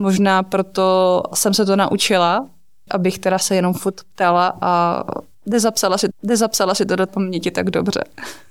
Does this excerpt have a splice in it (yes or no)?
yes